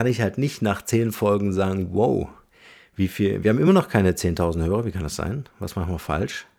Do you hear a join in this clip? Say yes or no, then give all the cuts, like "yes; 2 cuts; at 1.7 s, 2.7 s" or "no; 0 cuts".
no; 0 cuts